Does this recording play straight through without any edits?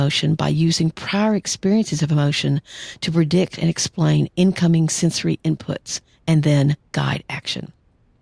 yes; 0 cuts

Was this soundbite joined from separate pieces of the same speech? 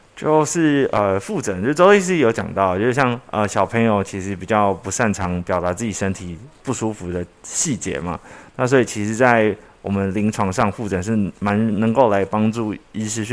no; 0 cuts

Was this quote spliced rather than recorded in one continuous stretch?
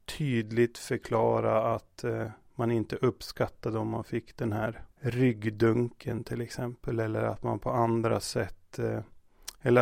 yes; 1 cut; at 4.9 s

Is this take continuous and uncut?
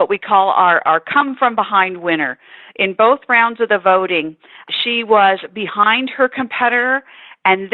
yes; 0 cuts

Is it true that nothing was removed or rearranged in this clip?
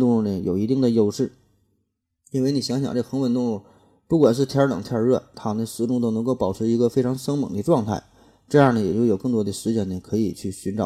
yes; 0 cuts

